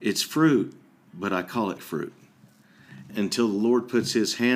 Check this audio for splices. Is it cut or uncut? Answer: cut